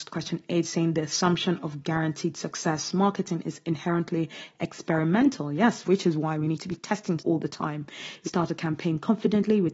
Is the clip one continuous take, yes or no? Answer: no